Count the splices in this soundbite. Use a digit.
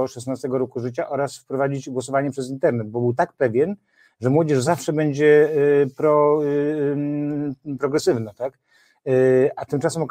0